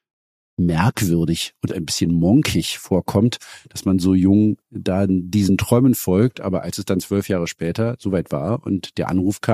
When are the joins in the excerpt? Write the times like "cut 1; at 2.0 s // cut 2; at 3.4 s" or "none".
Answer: cut 1; at 4.6 s